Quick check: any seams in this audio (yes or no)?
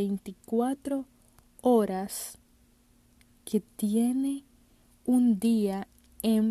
no